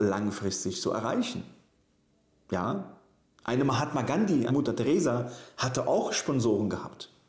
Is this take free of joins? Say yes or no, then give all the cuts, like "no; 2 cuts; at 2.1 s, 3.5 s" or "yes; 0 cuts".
no; 1 cut; at 4.5 s